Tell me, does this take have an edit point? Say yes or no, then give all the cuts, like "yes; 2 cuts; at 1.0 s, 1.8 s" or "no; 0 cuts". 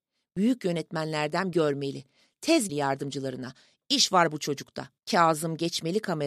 yes; 3 cuts; at 1.5 s, 2.7 s, 5.0 s